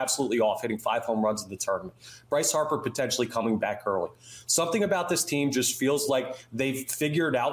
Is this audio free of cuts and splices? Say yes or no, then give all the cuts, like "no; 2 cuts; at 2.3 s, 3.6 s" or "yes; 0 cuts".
yes; 0 cuts